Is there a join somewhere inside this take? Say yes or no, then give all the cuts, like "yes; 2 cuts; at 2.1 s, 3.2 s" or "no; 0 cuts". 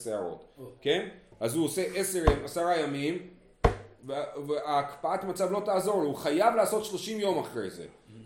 no; 0 cuts